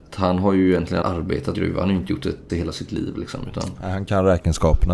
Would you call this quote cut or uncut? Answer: cut